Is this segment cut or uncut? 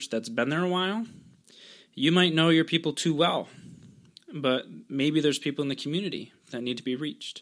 uncut